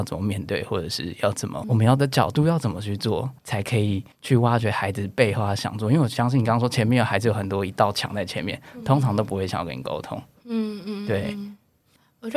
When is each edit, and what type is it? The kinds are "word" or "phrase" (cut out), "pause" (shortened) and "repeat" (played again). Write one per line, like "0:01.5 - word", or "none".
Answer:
0:01.6 - word
0:03.4 - pause
0:04.1 - pause

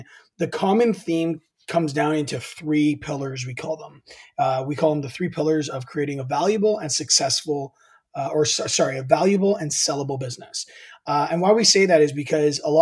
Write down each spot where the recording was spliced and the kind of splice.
none

